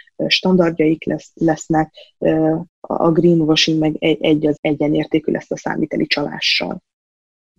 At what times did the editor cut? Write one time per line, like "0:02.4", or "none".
0:02.7
0:04.6